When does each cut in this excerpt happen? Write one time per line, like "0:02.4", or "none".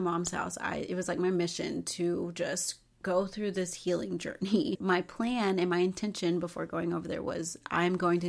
none